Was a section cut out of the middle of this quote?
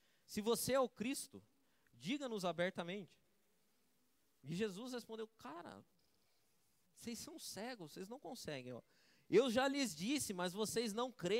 no; 0 cuts

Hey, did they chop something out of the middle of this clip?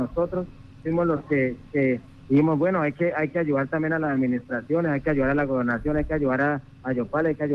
no; 0 cuts

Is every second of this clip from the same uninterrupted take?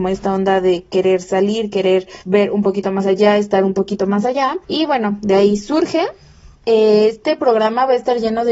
no; 3 cuts; at 2.2 s, 4.6 s, 6.5 s

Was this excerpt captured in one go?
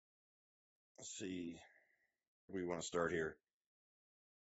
no; 1 cut; at 2.5 s

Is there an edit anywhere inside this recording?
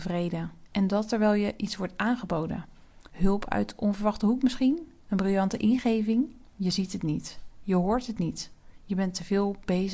yes; 2 cuts; at 3.1 s, 6.5 s

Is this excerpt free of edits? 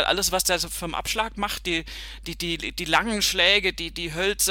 yes; 0 cuts

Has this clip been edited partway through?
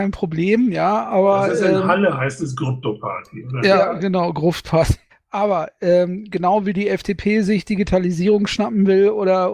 yes; 1 cut; at 5.1 s

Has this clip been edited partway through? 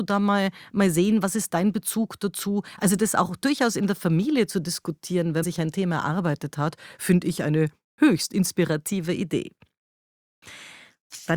yes; 2 cuts; at 1.5 s, 5.4 s

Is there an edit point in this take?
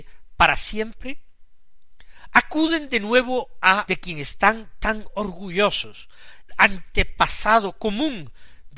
yes; 2 cuts; at 3.9 s, 6.5 s

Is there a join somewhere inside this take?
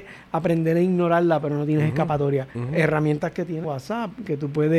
yes; 2 cuts; at 2.5 s, 3.6 s

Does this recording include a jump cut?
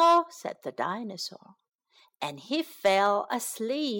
no; 0 cuts

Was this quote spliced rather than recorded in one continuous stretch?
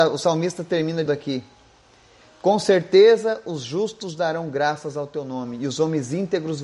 yes; 1 cut; at 1.1 s

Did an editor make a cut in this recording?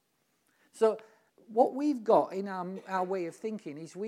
yes; 1 cut; at 1.3 s

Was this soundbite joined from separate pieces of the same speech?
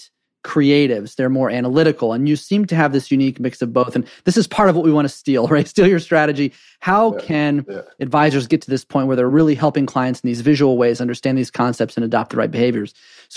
no; 0 cuts

